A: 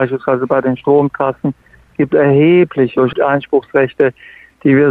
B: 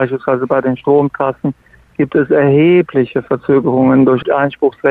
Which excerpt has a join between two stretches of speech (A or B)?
A